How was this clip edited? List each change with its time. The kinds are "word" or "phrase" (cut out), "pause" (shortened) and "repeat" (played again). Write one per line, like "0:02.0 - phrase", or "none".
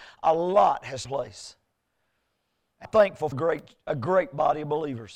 0:01.0 - word
0:02.8 - word
0:03.3 - word